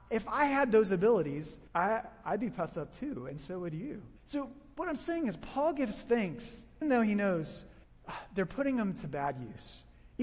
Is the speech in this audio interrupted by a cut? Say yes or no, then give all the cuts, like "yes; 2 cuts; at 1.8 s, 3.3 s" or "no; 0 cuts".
yes; 3 cuts; at 1.7 s, 4.2 s, 6.8 s